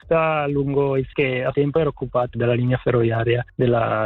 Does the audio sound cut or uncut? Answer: cut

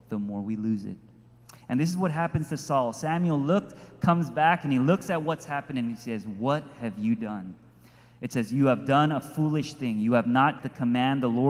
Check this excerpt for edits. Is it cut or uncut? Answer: cut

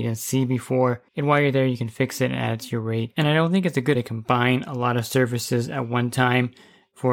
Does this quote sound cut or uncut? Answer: cut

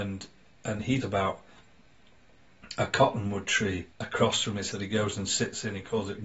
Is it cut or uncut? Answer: cut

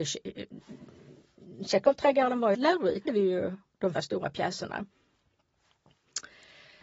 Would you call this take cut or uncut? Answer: cut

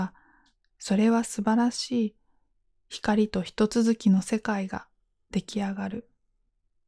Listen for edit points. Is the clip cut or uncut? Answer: uncut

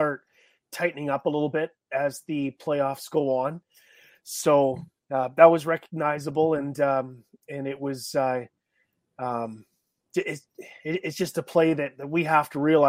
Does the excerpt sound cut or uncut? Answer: uncut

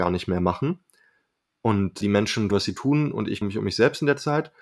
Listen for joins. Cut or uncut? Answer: cut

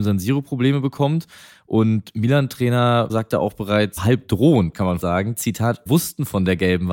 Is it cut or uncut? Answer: cut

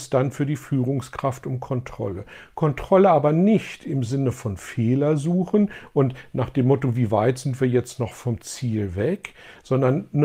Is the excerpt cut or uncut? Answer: uncut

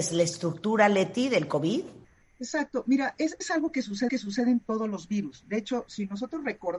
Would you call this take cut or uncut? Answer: cut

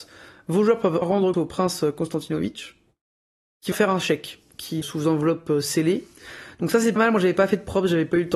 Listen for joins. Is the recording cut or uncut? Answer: cut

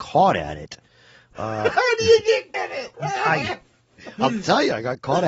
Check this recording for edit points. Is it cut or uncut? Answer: cut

